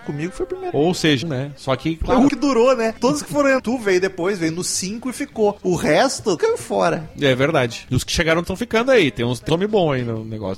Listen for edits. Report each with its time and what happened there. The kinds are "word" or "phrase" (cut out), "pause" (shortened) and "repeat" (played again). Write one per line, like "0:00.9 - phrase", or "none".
0:01.2 - word
0:02.3 - word
0:03.6 - word
0:06.4 - word
0:08.4 - word
0:09.5 - word